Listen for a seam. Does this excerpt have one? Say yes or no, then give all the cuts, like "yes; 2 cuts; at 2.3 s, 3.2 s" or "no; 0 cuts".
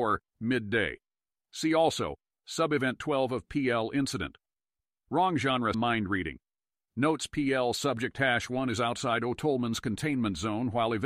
yes; 1 cut; at 5.7 s